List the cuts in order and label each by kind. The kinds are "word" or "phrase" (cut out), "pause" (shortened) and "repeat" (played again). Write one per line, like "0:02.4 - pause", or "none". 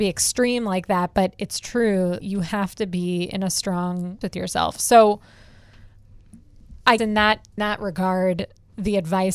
0:02.2 - word
0:04.2 - word
0:07.0 - word
0:07.6 - word